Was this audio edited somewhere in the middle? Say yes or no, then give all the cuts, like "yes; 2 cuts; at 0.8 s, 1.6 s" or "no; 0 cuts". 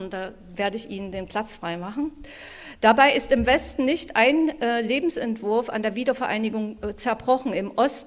no; 0 cuts